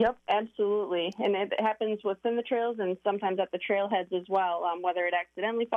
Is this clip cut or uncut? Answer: uncut